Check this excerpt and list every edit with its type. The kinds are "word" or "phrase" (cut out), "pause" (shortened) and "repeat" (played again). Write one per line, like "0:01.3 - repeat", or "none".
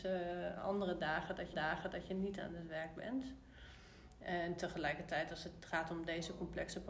0:01.5 - repeat